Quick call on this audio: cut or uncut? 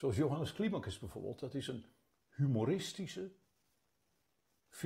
cut